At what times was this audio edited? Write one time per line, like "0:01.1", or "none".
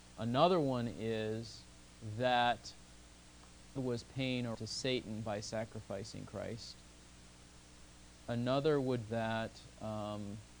0:03.8
0:04.5
0:09.1